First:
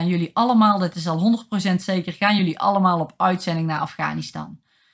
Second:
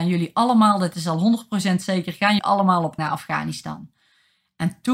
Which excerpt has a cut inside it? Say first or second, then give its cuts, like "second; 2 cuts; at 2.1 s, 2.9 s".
second; 2 cuts; at 2.4 s, 3.0 s